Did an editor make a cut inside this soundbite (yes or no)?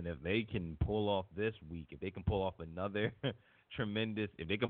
no